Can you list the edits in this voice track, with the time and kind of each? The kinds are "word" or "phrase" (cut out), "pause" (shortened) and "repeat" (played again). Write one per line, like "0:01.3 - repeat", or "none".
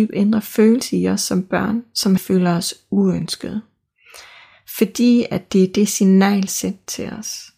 0:02.2 - phrase
0:06.5 - phrase